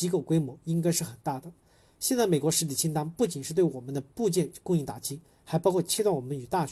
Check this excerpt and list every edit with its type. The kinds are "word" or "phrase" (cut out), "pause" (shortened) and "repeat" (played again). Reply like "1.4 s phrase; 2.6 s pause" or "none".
none